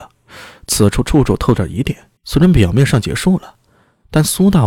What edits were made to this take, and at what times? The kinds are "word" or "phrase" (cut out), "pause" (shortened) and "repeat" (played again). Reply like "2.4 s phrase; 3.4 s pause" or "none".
2.2 s pause